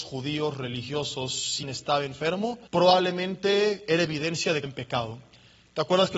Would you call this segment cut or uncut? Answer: cut